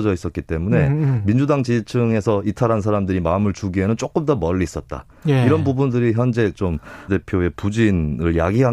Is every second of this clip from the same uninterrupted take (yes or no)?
no